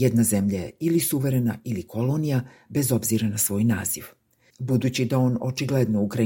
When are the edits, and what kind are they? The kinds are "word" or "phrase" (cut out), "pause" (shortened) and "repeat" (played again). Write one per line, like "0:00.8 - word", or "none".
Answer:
none